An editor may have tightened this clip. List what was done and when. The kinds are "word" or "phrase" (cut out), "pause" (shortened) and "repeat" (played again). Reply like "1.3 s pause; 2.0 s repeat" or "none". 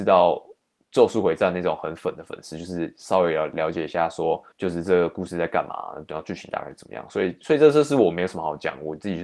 4.5 s pause